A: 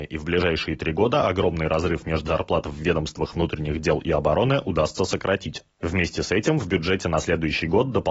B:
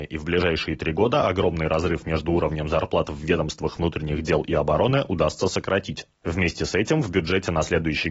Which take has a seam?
A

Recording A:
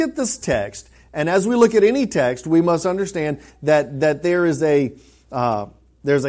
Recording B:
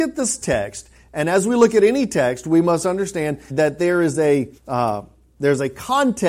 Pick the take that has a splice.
B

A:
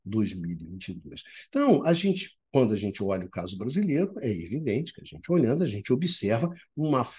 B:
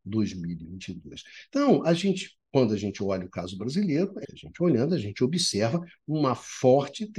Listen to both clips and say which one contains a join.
B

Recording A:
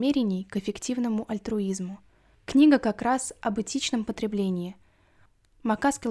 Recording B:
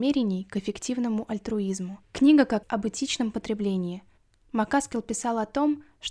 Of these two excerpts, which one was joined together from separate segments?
B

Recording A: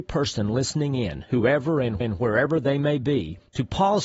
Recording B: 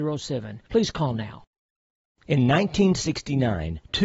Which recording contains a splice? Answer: A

